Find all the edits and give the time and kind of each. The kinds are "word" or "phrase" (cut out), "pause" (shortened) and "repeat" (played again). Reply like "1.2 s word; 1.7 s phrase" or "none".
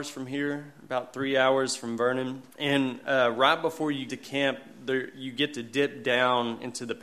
2.5 s pause; 4.1 s word